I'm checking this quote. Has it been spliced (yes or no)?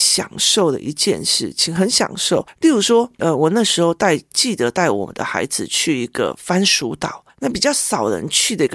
no